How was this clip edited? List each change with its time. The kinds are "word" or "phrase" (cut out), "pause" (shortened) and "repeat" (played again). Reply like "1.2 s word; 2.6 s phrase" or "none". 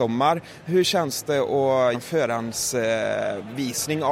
1.9 s word